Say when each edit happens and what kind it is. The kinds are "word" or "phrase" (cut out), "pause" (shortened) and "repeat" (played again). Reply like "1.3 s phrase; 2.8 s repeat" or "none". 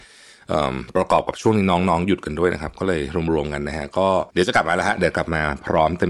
4.3 s pause